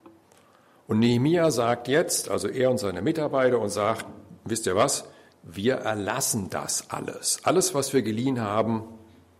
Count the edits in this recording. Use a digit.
0